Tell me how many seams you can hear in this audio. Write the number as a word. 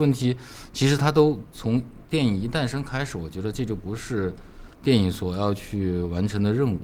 one